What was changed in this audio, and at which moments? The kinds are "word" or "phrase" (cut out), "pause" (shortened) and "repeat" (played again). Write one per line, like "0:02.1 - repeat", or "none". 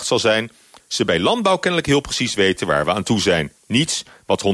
0:03.6 - pause